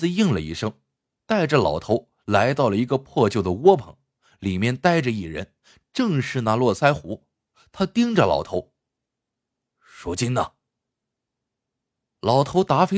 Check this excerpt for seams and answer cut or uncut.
uncut